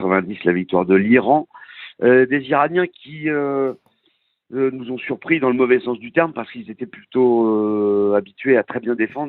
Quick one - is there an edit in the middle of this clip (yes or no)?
no